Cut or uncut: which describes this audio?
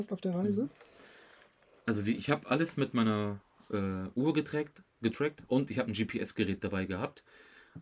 uncut